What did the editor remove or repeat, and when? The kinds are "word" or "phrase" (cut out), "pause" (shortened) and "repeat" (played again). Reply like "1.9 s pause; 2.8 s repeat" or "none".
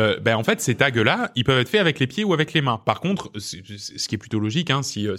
none